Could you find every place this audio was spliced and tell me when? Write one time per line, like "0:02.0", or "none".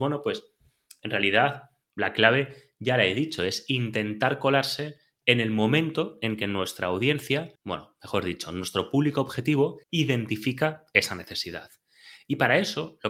0:07.6
0:09.8